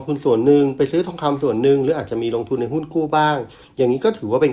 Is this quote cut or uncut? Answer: uncut